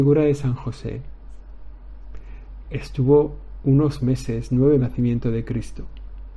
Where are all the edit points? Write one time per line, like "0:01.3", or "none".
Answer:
0:02.6
0:04.8